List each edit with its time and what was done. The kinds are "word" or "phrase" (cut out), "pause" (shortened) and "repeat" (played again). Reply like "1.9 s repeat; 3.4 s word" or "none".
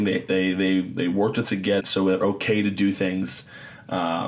1.4 s word; 1.8 s word; 2.2 s phrase